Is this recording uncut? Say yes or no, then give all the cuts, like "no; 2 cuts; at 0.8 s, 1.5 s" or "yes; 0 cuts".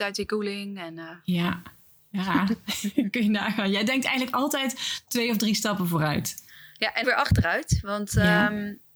no; 1 cut; at 7.0 s